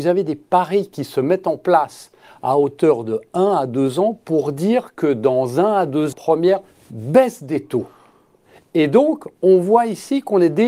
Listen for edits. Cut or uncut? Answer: cut